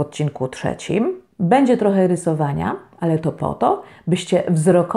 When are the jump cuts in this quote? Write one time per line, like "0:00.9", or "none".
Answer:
0:01.3